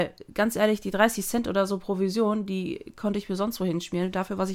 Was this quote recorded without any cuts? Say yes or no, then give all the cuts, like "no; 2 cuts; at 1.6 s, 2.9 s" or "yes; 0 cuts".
yes; 0 cuts